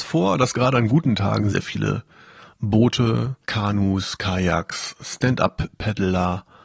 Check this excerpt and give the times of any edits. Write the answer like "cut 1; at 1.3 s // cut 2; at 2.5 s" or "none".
cut 1; at 1.5 s // cut 2; at 3.4 s